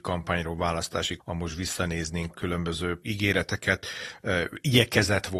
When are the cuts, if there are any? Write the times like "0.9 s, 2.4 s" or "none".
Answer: 1.2 s, 2.3 s, 3.0 s